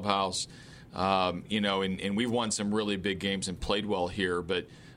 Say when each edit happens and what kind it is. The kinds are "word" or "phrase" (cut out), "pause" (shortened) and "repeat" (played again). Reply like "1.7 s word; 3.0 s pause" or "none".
none